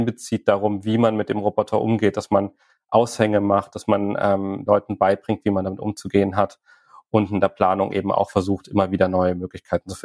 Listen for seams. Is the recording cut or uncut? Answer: cut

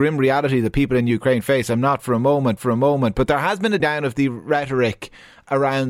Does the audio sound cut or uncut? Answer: cut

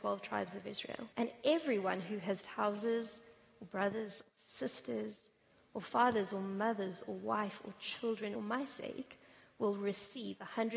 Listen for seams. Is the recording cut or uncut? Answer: cut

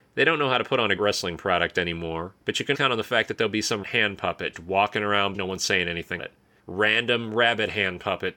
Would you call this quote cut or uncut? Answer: cut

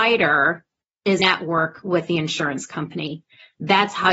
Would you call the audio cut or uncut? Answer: cut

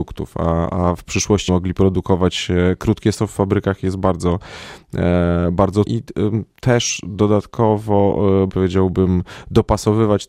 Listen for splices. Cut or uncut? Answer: cut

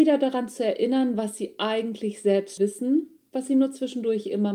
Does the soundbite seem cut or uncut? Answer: cut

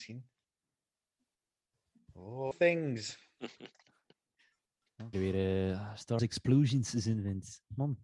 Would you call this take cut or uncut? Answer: cut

